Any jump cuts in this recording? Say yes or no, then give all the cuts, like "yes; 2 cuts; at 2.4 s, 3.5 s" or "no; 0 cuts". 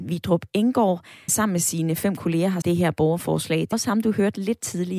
yes; 3 cuts; at 1.3 s, 2.6 s, 3.7 s